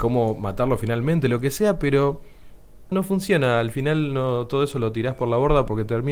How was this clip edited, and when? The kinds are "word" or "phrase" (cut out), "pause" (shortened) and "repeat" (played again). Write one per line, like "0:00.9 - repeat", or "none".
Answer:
0:02.9 - word